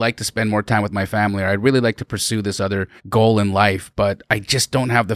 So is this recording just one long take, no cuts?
no; 1 cut; at 3.0 s

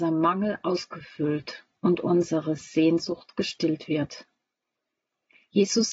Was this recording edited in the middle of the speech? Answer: no; 0 cuts

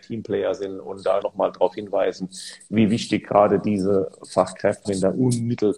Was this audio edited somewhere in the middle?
yes; 2 cuts; at 1.2 s, 4.8 s

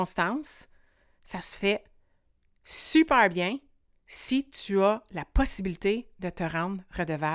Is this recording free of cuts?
yes; 0 cuts

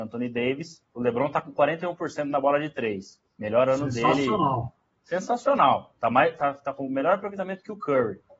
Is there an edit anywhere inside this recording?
no; 0 cuts

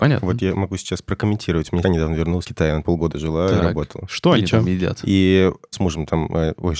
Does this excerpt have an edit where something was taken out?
yes; 4 cuts; at 1.8 s, 2.4 s, 2.8 s, 5.7 s

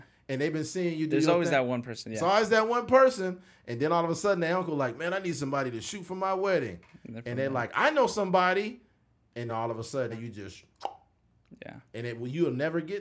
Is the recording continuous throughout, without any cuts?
no; 2 cuts; at 9.5 s, 10.1 s

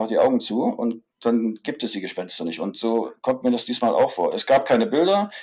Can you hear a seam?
yes; 1 cut; at 1.1 s

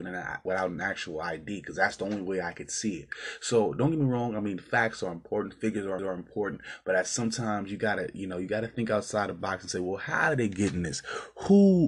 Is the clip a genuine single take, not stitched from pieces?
no; 1 cut; at 6.0 s

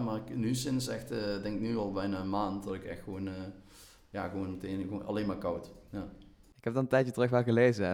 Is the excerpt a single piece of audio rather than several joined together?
yes; 0 cuts

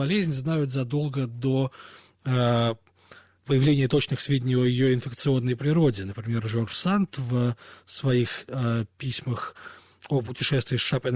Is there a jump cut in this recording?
no; 0 cuts

